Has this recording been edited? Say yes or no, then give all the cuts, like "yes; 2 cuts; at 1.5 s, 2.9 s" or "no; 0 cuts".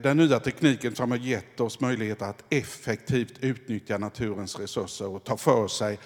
no; 0 cuts